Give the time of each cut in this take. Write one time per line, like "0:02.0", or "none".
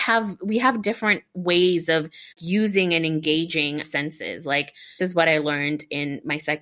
0:02.3
0:03.8
0:05.0